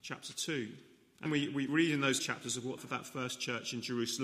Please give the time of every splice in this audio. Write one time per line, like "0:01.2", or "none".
0:01.3
0:01.7
0:02.2
0:02.8